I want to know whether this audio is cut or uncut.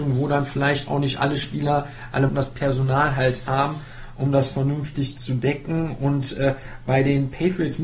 cut